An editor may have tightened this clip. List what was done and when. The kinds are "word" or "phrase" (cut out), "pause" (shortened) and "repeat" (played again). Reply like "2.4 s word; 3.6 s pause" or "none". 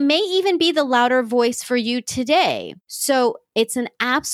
2.8 s pause